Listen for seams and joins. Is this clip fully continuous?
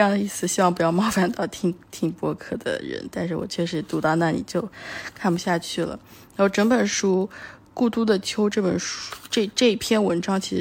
yes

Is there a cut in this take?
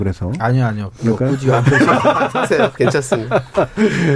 no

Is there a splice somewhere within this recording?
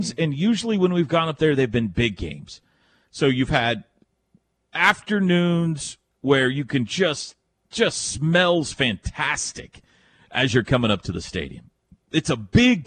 no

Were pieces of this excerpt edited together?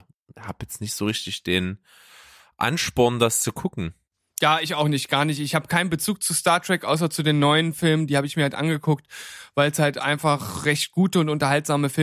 no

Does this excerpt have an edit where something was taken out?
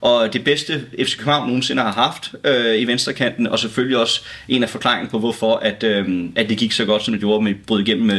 no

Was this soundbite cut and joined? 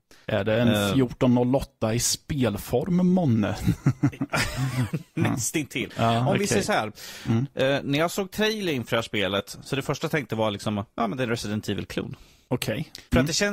no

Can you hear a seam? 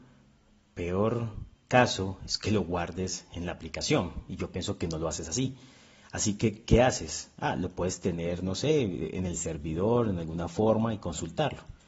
no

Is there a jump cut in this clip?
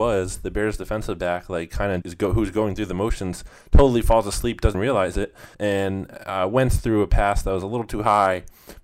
yes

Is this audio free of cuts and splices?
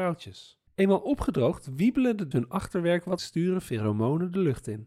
no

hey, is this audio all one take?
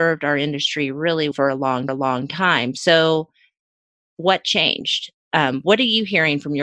no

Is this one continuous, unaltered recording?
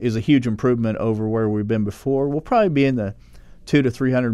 yes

